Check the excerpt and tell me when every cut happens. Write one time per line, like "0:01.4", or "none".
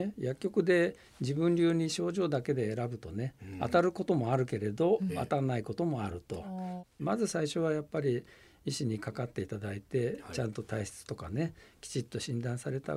none